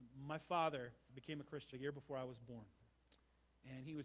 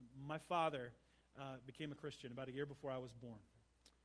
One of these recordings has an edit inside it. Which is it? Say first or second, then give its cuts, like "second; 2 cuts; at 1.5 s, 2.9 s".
first; 2 cuts; at 1.1 s, 1.7 s